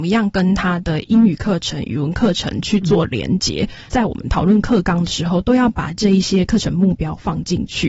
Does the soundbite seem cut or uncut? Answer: uncut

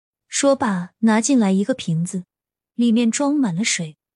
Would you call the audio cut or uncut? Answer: uncut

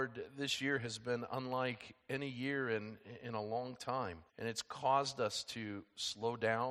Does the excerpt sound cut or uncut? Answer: cut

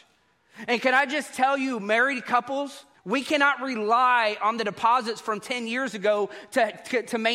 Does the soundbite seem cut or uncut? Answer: cut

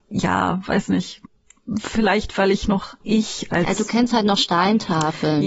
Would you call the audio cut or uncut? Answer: uncut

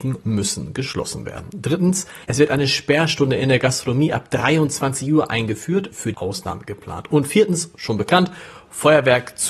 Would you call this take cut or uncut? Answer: cut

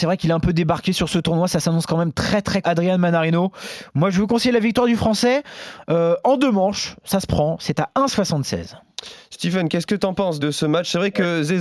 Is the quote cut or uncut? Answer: cut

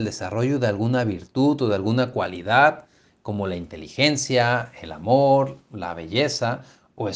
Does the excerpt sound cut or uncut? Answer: uncut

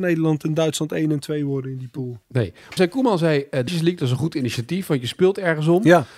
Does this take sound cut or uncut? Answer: cut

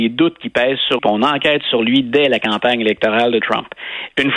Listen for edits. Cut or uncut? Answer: cut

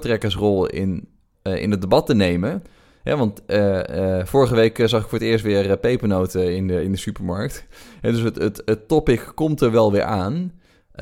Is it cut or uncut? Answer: uncut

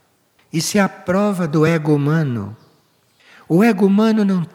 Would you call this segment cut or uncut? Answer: uncut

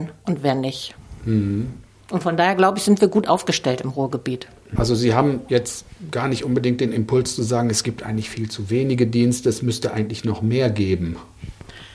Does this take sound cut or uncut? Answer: uncut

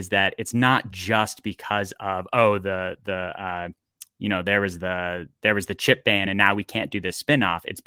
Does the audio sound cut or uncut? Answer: uncut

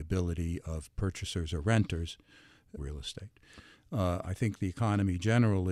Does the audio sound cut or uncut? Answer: cut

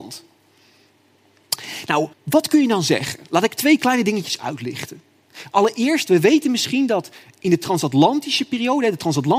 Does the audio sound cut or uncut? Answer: cut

